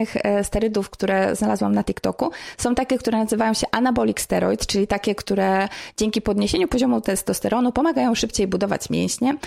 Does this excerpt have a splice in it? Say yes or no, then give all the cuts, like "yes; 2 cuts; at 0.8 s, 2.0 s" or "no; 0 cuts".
no; 0 cuts